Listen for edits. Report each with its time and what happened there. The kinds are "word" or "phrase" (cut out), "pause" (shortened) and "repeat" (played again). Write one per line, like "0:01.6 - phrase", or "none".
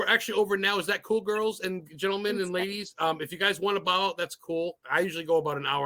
none

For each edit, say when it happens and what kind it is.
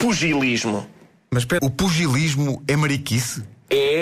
0:01.6 - word

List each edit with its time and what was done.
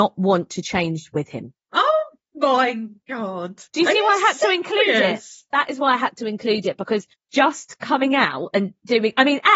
0:01.6 - pause
0:03.7 - pause
0:07.1 - pause

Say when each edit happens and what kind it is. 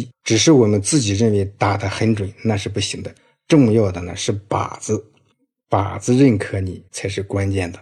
0:06.9 - pause

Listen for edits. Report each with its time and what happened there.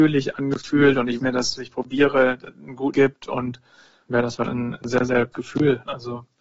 0:01.2 - phrase
0:01.6 - word
0:02.9 - word
0:04.1 - word
0:04.5 - word
0:05.3 - word

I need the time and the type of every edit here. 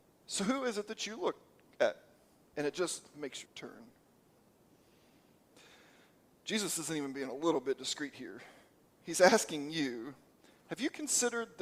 0:03.5 - word

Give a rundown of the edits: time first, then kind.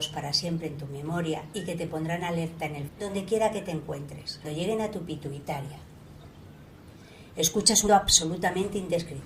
0:02.9 - word
0:04.4 - word
0:07.9 - word

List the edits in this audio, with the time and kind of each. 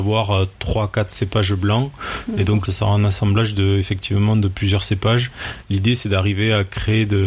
0:02.7 - phrase

